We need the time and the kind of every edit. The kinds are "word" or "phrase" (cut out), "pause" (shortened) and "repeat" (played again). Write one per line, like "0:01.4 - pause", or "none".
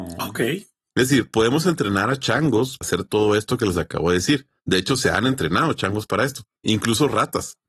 0:02.8 - word
0:06.6 - pause